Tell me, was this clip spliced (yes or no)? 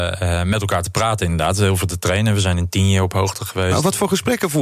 no